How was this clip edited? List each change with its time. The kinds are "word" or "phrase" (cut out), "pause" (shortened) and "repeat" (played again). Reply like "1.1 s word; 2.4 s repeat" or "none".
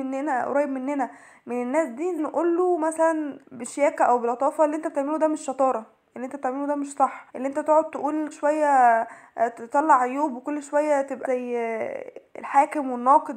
2.2 s word; 3.4 s pause; 7.3 s pause; 8.3 s word; 11.2 s word